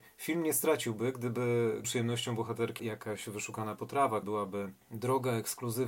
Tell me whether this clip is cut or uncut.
cut